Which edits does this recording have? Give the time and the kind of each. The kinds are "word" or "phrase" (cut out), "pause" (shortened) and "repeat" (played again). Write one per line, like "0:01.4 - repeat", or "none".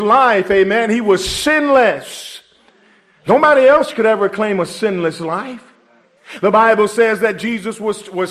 none